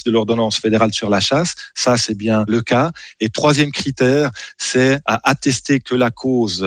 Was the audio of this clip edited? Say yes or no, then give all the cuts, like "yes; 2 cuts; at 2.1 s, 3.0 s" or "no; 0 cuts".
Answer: no; 0 cuts